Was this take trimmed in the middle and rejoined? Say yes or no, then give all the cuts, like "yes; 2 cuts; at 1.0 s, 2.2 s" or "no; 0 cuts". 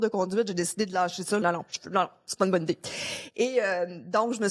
yes; 1 cut; at 1.4 s